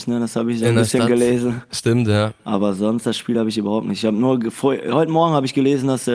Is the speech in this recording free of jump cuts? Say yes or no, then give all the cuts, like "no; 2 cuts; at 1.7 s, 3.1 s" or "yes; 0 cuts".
yes; 0 cuts